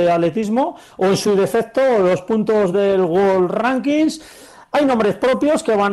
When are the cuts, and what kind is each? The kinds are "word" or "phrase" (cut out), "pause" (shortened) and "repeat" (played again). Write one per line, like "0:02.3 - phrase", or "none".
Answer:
none